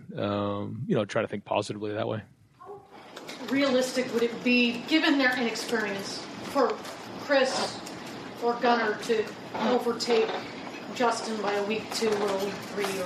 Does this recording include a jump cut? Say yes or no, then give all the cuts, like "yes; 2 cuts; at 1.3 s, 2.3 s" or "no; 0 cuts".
no; 0 cuts